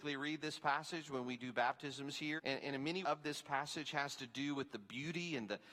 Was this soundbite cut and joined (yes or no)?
yes